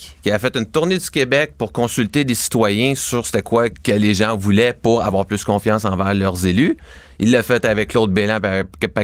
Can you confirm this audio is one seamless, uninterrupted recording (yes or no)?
no